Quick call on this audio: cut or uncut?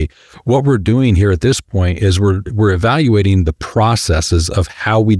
uncut